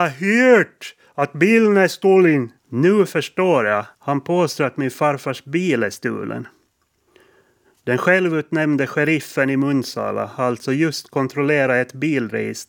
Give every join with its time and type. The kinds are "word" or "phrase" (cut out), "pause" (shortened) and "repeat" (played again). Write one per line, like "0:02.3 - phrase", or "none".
0:02.6 - pause
0:03.9 - pause